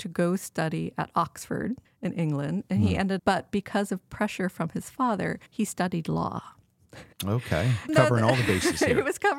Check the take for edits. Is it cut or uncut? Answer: cut